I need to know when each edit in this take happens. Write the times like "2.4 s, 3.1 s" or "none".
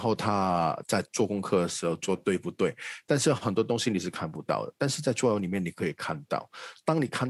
1.1 s

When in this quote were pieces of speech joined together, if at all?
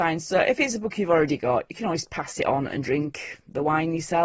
none

